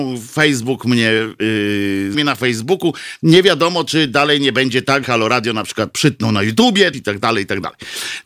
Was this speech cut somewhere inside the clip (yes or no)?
yes